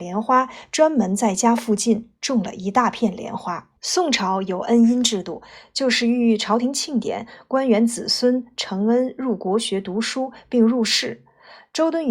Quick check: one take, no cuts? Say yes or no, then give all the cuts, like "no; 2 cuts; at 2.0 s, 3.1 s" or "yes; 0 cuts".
no; 1 cut; at 3.8 s